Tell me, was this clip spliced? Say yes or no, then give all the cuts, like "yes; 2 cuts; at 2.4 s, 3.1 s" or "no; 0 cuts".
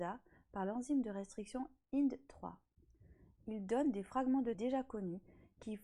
yes; 1 cut; at 4.5 s